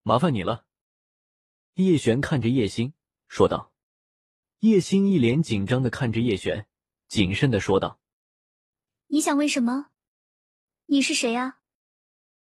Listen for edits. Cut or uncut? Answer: uncut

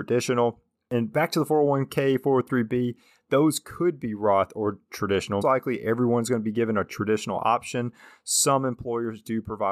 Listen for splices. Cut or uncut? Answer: cut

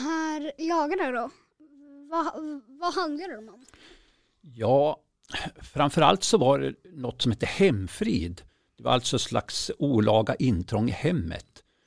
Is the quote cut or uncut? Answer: uncut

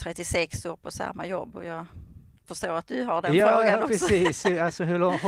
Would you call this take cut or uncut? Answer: uncut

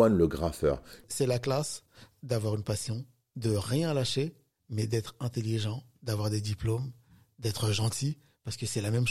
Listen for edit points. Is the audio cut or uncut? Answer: uncut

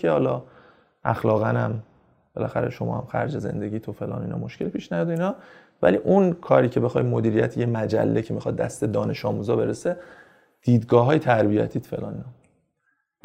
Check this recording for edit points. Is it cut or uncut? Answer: uncut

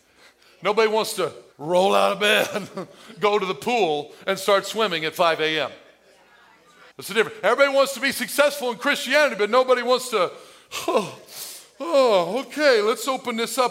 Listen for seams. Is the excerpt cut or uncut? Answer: cut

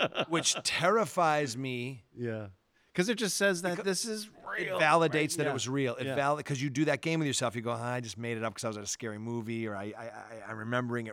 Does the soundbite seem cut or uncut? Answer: uncut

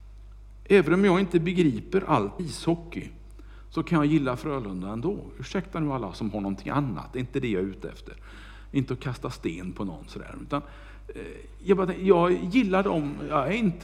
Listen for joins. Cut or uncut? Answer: cut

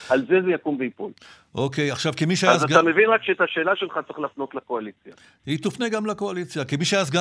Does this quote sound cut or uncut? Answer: uncut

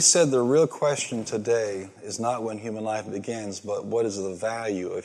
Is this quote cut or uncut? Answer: uncut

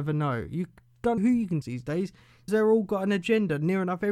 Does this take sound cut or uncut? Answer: cut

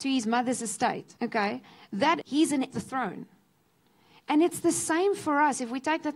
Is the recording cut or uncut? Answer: cut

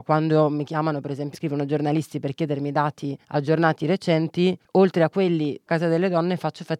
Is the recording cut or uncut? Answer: cut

